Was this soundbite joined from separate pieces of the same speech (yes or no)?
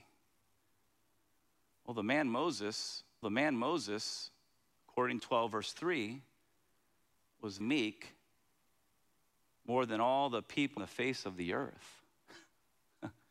yes